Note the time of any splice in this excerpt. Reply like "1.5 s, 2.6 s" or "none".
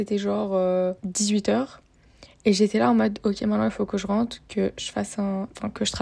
1.0 s